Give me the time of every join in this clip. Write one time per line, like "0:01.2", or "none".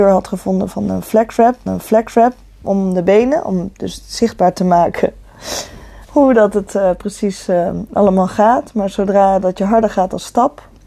0:01.7
0:06.0